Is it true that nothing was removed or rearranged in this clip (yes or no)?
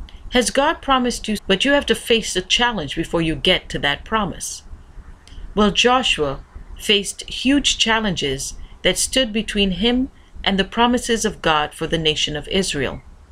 no